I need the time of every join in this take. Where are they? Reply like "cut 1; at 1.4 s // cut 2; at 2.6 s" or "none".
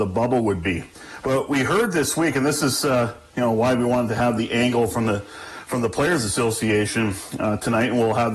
none